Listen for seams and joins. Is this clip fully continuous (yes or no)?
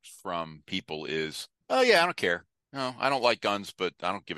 no